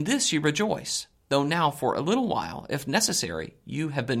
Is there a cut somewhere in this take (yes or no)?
no